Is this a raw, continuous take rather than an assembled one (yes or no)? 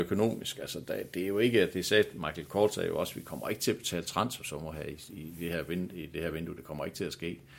yes